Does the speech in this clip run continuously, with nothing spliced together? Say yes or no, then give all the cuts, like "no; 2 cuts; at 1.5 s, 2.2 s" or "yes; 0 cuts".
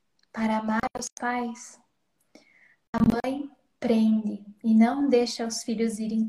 yes; 0 cuts